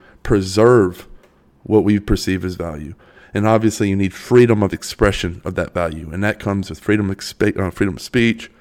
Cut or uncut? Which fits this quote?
uncut